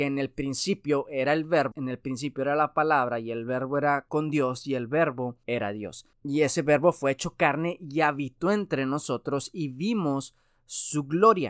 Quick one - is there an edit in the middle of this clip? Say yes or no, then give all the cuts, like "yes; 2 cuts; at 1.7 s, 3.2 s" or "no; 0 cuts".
yes; 1 cut; at 1.7 s